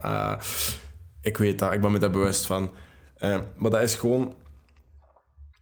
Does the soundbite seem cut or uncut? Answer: uncut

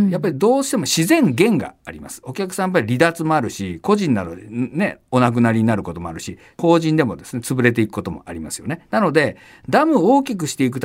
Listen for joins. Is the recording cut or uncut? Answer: uncut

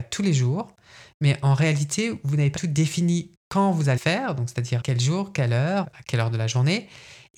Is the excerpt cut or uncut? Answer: cut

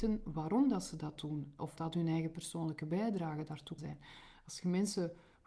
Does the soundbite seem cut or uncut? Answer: cut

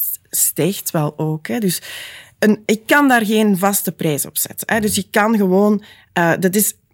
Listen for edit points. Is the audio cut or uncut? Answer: uncut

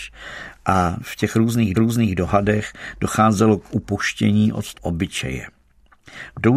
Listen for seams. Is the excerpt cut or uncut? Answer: cut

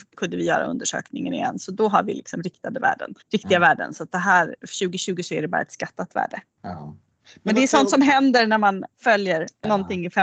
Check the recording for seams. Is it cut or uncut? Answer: cut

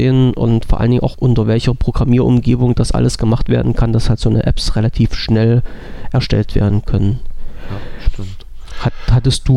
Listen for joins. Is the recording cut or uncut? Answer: cut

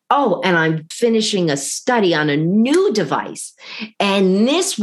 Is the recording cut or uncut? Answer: cut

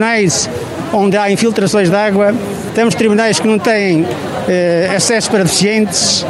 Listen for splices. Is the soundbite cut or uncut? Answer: uncut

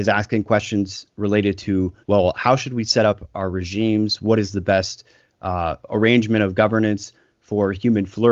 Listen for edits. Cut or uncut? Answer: cut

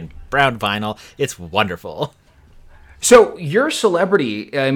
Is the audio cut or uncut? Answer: uncut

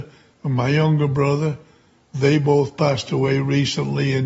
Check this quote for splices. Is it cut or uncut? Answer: uncut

